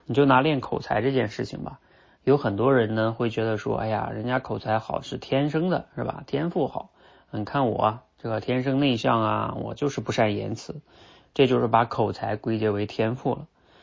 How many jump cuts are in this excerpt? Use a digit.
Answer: 0